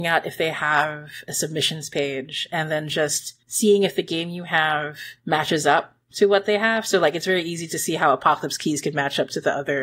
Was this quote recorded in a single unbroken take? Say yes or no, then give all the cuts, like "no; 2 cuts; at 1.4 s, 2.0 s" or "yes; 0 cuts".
no; 3 cuts; at 3.4 s, 5.2 s, 6.0 s